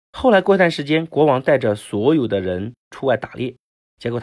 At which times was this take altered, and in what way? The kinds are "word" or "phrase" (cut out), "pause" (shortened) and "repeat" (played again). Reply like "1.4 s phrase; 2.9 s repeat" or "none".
2.8 s pause